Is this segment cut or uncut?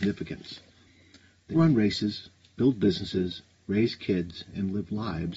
cut